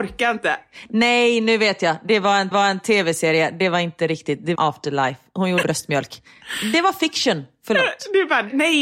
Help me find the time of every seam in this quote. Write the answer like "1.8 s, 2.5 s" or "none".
2.5 s, 4.6 s, 5.6 s

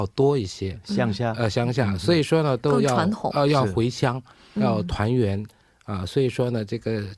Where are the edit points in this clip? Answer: none

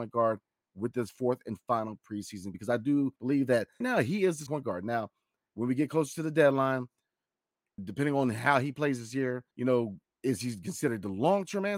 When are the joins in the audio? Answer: 2.5 s, 3.2 s, 3.8 s, 4.5 s, 7.8 s, 9.5 s

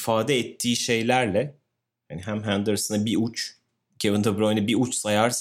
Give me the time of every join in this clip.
none

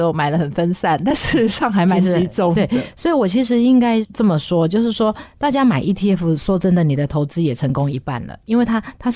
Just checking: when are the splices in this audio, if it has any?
none

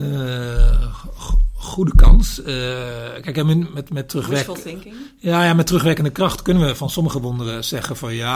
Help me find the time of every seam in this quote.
none

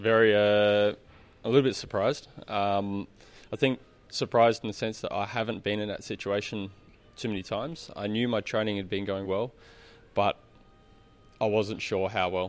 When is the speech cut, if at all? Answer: 9.2 s

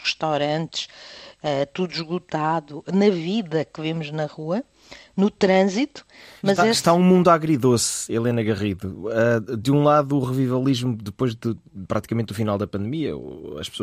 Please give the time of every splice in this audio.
none

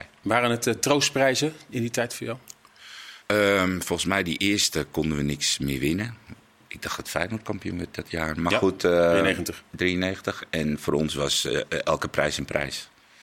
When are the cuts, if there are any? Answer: 3.2 s

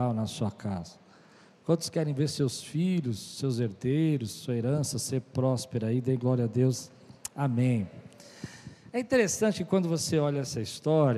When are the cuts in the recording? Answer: none

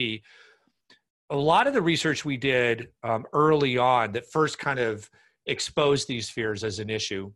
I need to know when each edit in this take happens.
none

